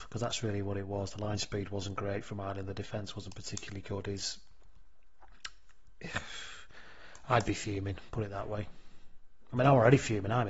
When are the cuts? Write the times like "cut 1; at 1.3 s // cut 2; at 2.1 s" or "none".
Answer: none